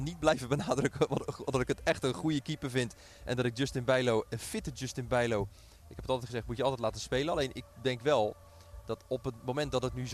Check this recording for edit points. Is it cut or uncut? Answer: uncut